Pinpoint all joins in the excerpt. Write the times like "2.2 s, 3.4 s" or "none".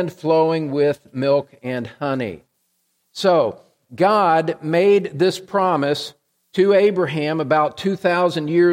none